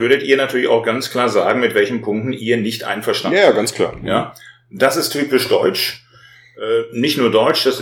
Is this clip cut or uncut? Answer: uncut